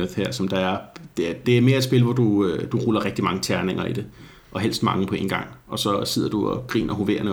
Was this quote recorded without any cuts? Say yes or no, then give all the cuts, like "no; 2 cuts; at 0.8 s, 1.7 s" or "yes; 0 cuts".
no; 1 cut; at 1.4 s